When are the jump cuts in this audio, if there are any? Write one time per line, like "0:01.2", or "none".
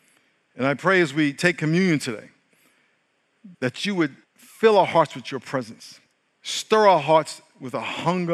0:03.5
0:04.2
0:06.1